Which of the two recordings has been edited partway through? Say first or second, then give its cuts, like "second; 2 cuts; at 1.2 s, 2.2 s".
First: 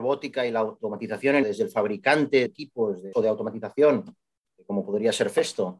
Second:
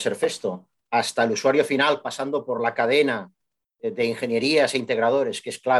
first; 3 cuts; at 1.4 s, 2.5 s, 3.1 s